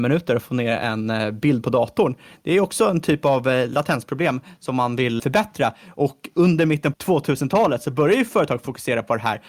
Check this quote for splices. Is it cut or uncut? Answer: cut